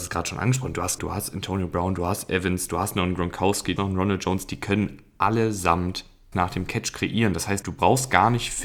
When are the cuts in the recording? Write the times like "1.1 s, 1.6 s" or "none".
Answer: 1.0 s, 3.8 s, 6.3 s, 7.6 s